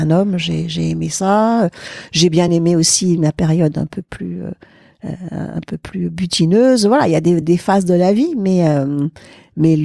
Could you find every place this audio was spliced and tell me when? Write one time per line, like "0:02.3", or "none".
none